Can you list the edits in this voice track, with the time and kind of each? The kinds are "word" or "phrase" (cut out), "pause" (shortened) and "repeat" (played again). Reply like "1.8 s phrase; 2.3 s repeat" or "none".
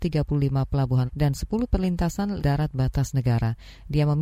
1.1 s word; 2.4 s word